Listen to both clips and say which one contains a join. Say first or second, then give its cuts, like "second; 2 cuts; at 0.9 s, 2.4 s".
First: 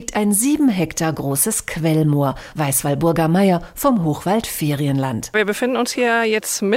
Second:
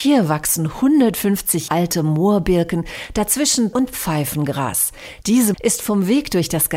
second; 3 cuts; at 1.7 s, 3.7 s, 5.5 s